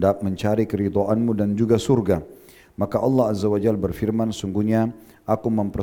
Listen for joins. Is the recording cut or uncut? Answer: uncut